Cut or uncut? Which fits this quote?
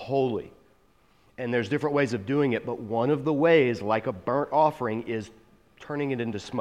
uncut